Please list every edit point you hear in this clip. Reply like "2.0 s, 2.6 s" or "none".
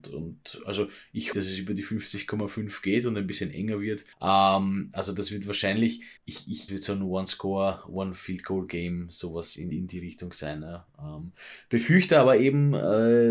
1.3 s, 4.1 s, 6.2 s, 6.7 s, 9.7 s

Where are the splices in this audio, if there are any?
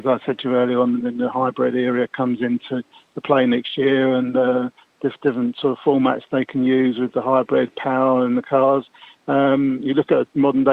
1.0 s

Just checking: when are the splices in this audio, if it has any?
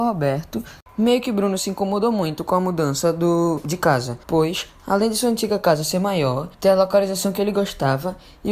4.2 s, 6.5 s

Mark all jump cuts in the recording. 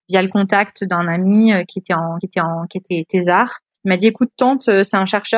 2.2 s, 3.7 s

